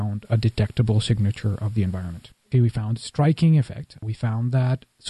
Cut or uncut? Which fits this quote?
cut